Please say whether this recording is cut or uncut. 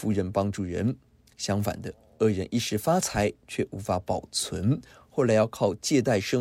uncut